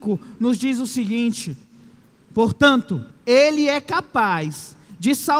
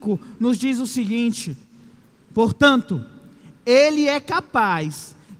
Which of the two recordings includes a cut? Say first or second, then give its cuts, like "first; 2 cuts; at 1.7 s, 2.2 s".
first; 1 cut; at 3.1 s